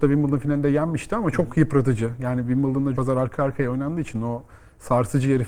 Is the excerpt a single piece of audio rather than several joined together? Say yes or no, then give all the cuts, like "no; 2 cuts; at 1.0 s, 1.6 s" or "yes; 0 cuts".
no; 1 cut; at 3.0 s